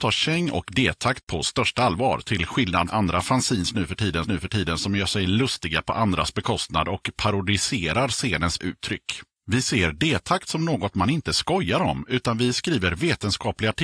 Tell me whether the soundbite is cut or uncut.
cut